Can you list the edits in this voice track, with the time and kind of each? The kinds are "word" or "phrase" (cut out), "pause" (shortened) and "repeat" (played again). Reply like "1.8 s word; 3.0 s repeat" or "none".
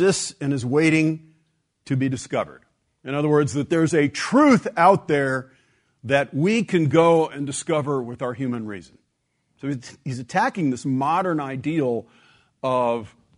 none